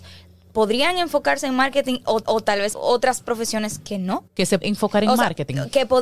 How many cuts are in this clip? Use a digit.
4